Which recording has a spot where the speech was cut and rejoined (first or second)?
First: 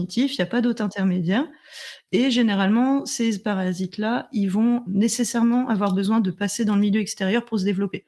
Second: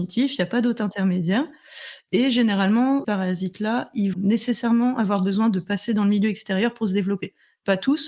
second